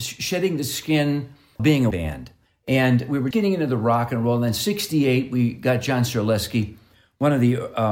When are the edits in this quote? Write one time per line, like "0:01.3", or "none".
0:01.6
0:01.9
0:03.3